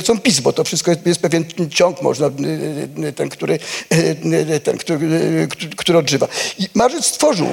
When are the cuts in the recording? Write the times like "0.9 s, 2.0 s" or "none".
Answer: none